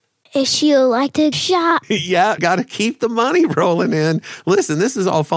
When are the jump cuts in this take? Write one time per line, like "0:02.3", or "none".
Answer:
0:01.3
0:02.4